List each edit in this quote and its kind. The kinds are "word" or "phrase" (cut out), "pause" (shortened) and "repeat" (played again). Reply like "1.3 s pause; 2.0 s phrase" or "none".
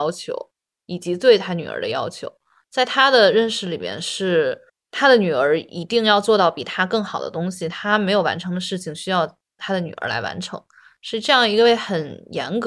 4.7 s pause